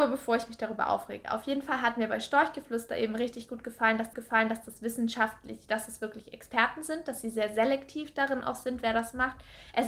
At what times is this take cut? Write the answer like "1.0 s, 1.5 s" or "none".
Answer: 4.1 s